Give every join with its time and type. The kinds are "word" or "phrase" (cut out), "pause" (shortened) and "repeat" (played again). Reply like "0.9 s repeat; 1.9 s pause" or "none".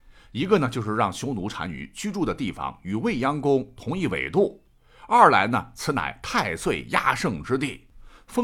none